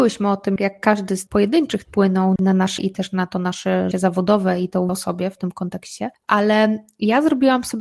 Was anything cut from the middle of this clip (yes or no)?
yes